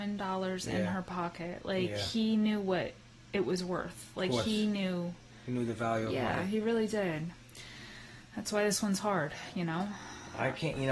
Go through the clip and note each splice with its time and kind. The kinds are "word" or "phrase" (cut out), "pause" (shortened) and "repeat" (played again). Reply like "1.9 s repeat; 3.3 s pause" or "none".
none